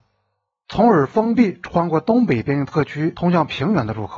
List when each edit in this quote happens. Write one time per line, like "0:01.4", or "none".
none